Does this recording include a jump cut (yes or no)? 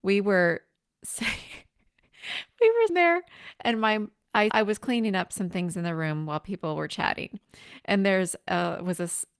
yes